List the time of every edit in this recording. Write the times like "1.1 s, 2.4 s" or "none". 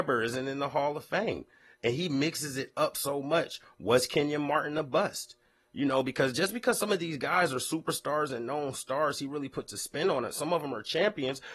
none